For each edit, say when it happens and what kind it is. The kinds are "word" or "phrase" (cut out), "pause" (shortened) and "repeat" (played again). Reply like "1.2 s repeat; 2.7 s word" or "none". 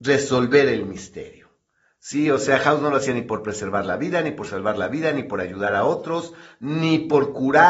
none